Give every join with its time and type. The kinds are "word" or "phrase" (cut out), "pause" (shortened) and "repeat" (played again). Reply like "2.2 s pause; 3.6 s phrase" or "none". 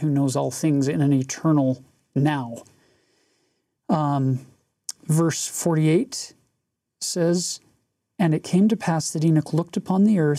none